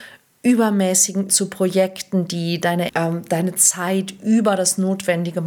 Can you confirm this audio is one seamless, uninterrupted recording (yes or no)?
no